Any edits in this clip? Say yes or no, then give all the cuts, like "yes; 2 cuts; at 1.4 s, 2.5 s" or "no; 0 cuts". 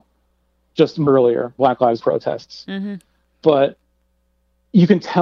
yes; 3 cuts; at 1.1 s, 1.6 s, 2.0 s